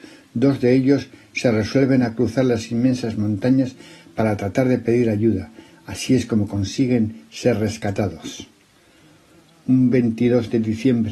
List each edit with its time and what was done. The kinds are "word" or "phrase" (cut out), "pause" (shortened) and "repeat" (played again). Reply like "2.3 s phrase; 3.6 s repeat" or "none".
none